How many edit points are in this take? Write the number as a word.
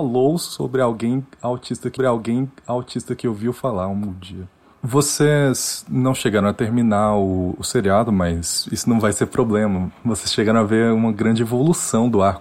two